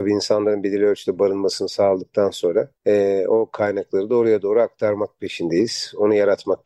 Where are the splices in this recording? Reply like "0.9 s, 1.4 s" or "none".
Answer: 2.8 s